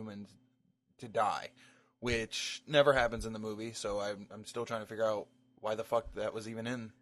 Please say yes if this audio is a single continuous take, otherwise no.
yes